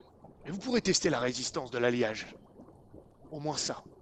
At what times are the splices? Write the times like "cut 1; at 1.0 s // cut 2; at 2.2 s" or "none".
none